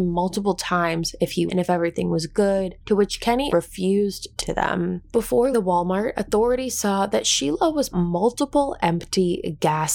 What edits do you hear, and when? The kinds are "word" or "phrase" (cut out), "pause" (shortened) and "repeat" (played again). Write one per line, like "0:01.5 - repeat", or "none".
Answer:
0:01.5 - phrase
0:02.8 - pause
0:03.5 - word
0:04.4 - word
0:05.5 - word
0:07.9 - word